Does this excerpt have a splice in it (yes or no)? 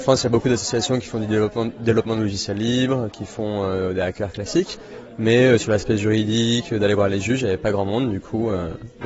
no